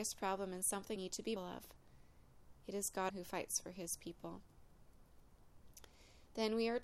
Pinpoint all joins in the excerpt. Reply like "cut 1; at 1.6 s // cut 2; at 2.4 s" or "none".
cut 1; at 1.0 s // cut 2; at 1.4 s // cut 3; at 3.1 s